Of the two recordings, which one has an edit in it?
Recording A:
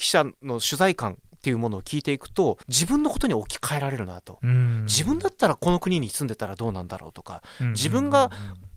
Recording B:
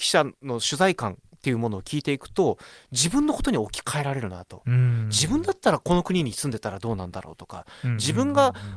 A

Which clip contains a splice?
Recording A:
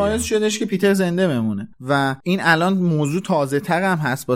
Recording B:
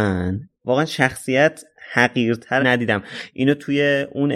B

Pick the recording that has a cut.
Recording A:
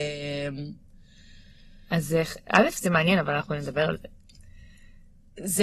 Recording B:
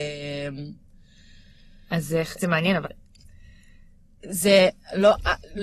B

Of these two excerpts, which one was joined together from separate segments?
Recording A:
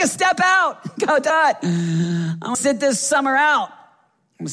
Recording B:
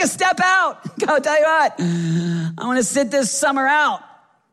A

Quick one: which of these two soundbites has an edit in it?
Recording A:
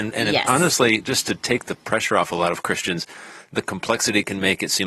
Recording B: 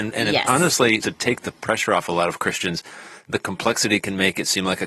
B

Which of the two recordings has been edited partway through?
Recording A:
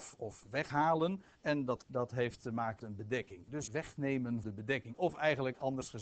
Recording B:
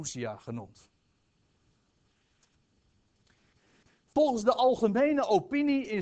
A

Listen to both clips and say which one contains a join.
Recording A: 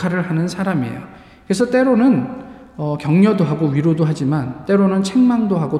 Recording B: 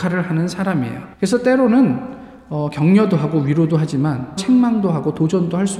B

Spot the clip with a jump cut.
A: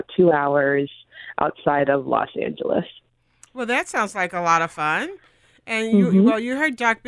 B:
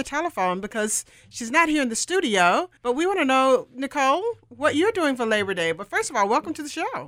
B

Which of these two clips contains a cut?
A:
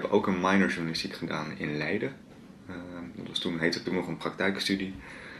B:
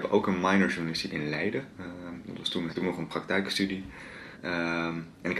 B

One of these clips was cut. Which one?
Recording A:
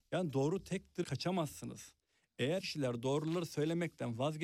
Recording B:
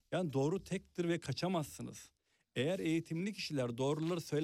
A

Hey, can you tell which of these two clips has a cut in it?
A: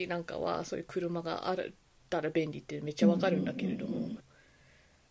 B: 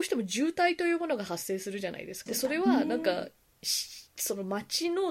B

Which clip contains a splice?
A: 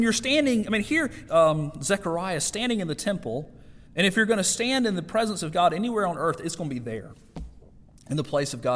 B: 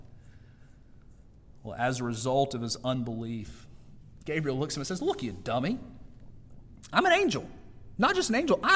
A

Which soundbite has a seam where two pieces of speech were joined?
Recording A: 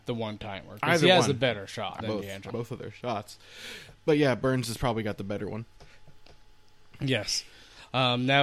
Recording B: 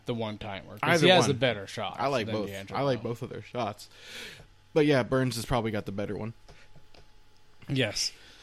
A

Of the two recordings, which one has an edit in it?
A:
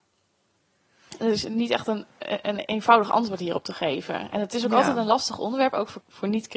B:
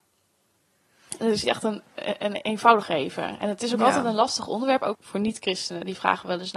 B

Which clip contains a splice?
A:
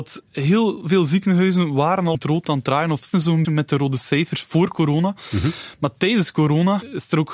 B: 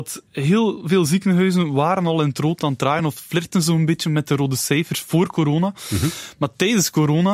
A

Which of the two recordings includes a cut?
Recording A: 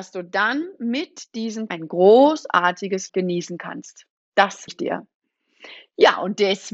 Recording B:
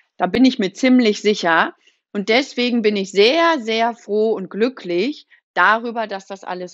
A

